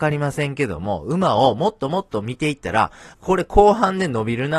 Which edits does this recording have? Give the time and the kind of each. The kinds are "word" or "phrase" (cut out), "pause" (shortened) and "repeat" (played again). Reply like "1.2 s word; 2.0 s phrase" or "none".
3.1 s word